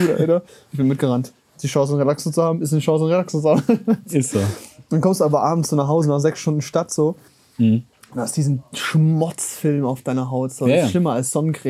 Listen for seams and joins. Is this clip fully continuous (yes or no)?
yes